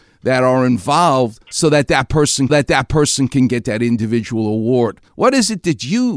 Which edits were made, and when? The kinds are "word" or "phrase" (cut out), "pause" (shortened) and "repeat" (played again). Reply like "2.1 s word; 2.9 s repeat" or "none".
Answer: 1.4 s pause; 2.5 s repeat; 5.1 s pause